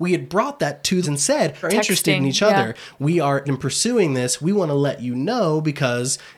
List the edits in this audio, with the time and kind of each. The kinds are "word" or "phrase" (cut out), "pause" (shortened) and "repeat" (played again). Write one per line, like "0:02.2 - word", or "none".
0:01.0 - word
0:01.6 - word
0:03.4 - word